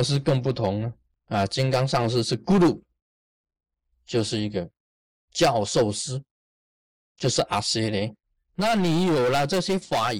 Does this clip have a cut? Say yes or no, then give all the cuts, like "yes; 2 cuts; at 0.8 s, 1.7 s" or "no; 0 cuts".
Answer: no; 0 cuts